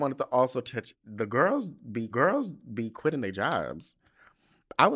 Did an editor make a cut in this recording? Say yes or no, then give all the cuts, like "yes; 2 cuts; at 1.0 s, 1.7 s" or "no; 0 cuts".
yes; 2 cuts; at 0.9 s, 2.1 s